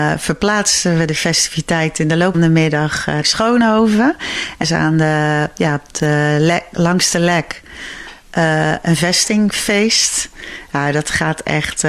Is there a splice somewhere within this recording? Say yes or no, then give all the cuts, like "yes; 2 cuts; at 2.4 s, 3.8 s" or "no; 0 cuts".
yes; 3 cuts; at 2.3 s, 3.2 s, 4.6 s